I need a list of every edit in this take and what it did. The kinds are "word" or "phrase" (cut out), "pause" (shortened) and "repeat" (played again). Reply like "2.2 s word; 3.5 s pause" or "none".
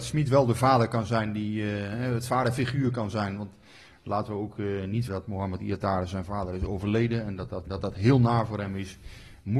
5.1 s word; 7.7 s word